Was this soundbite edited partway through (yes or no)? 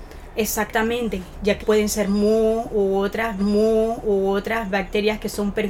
yes